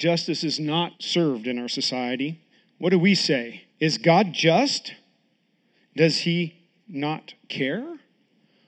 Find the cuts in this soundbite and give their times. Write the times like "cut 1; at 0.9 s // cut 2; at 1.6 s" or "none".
cut 1; at 0.9 s // cut 2; at 2.5 s // cut 3; at 3.7 s